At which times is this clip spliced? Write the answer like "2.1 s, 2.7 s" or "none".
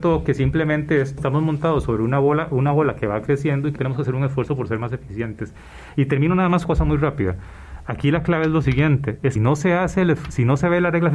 1.2 s, 3.8 s, 6.6 s, 9.4 s